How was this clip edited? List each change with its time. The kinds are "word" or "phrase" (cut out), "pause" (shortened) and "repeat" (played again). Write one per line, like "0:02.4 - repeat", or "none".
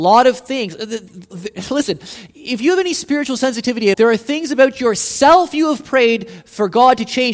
0:01.3 - word
0:03.9 - word